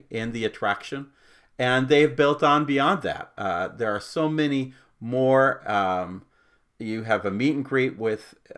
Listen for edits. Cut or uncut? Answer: uncut